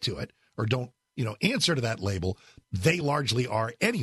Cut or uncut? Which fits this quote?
uncut